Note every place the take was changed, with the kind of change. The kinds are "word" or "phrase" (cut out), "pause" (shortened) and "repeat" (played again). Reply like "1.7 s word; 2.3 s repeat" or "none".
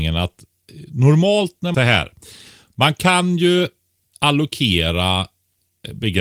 1.7 s phrase